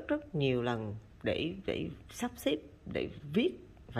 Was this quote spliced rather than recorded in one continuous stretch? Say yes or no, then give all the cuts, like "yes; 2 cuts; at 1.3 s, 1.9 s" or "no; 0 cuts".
no; 0 cuts